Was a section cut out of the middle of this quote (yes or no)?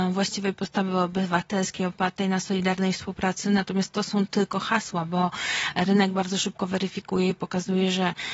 no